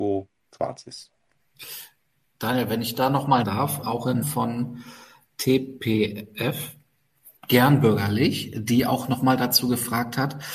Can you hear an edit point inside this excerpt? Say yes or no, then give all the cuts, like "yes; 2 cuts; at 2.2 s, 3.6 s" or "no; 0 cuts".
yes; 3 cuts; at 3.4 s, 3.8 s, 4.2 s